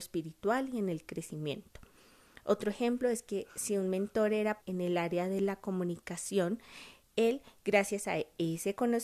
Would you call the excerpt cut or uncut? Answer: cut